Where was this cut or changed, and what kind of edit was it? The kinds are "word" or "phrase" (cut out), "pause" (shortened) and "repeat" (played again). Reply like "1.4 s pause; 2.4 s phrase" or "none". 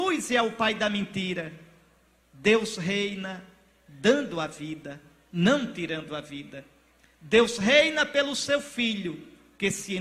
none